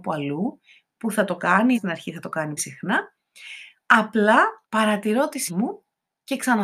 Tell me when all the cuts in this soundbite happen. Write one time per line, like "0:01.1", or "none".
0:01.7
0:02.6
0:04.6
0:05.5

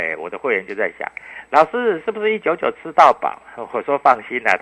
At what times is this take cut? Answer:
none

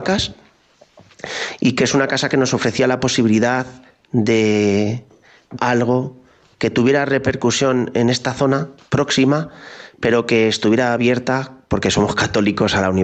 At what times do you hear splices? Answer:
0:05.6
0:08.8

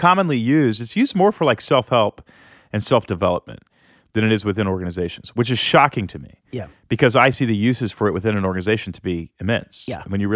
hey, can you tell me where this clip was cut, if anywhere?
none

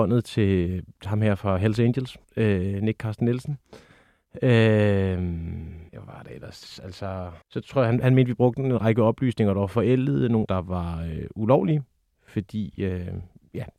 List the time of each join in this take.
0:02.2
0:05.9
0:07.4
0:10.4

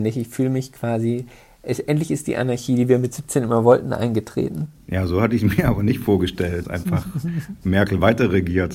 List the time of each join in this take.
0:06.6

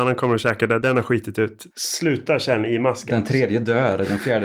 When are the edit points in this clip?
0:01.7

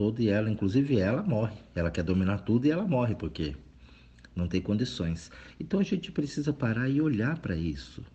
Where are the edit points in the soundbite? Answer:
none

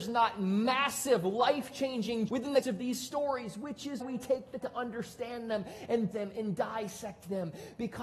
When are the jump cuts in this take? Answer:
0:02.3
0:02.6
0:04.0
0:04.6
0:06.1

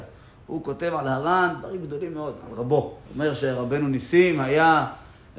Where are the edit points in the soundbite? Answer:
0:03.0

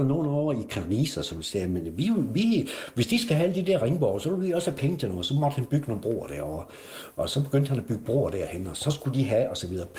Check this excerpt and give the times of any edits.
none

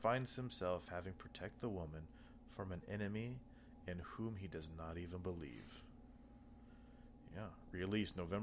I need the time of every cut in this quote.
none

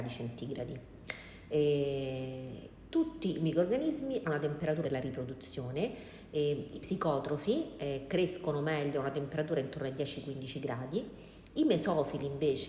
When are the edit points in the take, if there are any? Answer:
0:04.2
0:04.8
0:06.7

